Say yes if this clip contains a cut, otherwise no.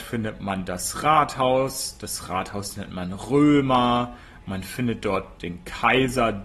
no